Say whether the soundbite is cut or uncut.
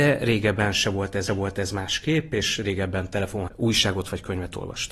cut